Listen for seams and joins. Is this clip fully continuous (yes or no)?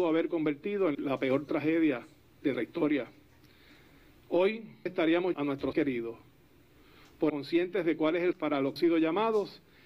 no